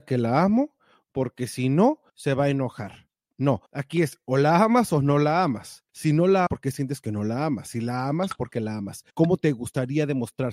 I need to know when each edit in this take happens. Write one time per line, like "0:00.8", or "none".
0:02.1
0:03.7
0:05.9
0:06.5
0:08.5
0:09.1